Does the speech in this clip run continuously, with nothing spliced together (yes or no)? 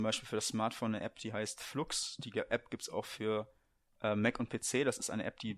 yes